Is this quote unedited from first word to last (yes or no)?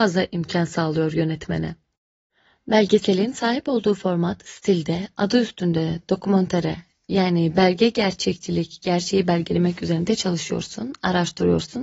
yes